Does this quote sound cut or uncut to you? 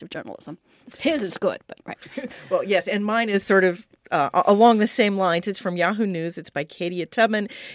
uncut